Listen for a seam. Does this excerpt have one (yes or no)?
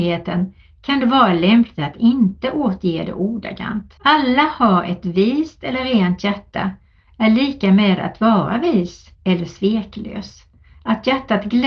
yes